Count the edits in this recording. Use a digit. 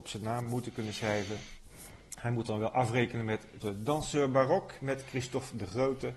1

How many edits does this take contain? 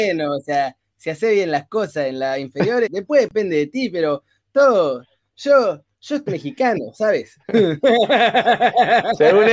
2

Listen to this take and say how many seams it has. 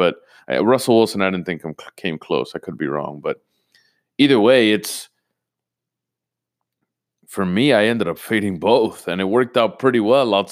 0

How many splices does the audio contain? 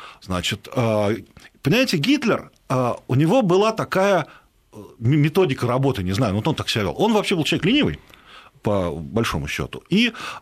0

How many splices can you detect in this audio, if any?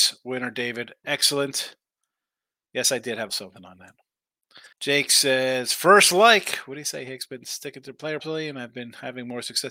3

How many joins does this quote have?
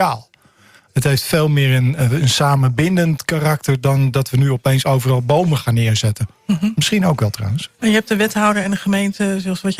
0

